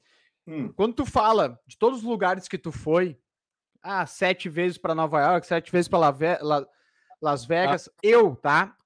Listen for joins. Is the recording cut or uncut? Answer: uncut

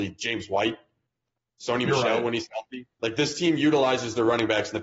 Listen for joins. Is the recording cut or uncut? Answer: cut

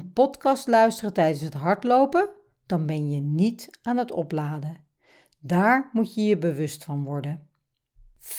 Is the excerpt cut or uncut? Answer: uncut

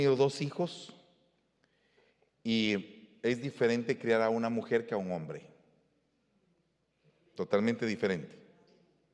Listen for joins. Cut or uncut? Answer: uncut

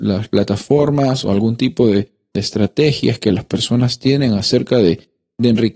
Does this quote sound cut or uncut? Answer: uncut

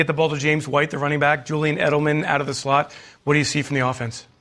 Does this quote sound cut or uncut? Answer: uncut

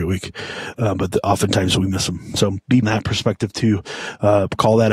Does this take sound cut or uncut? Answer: cut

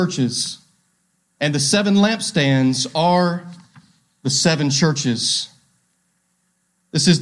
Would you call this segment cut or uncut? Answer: uncut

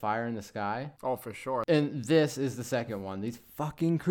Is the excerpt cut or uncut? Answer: uncut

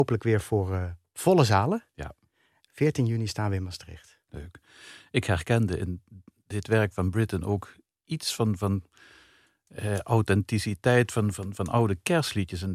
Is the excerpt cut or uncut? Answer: uncut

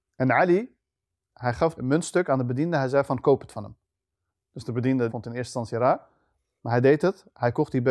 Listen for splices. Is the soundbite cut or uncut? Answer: cut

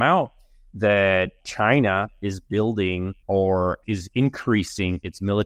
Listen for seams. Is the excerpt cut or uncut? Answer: cut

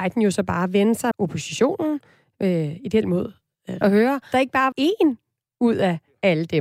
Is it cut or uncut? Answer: cut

